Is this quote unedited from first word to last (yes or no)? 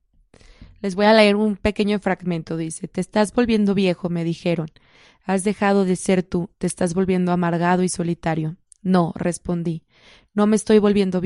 yes